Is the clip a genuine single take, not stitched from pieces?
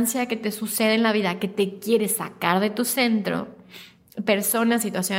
yes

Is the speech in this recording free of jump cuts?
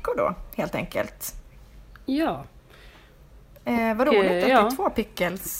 yes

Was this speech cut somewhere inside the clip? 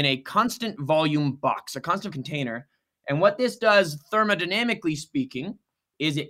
yes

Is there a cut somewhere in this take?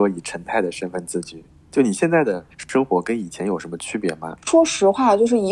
yes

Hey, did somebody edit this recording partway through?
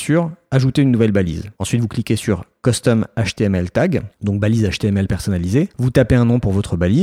no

